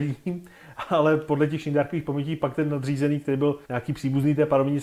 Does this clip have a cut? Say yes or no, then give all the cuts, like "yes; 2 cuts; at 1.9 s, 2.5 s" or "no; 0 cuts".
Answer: yes; 1 cut; at 3.6 s